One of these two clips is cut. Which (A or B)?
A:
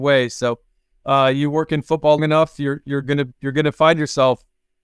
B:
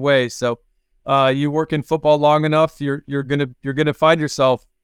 A